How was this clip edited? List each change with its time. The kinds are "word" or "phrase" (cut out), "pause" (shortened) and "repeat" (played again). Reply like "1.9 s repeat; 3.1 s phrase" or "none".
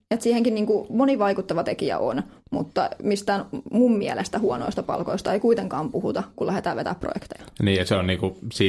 none